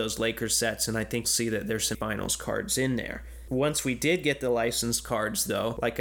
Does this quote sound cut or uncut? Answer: cut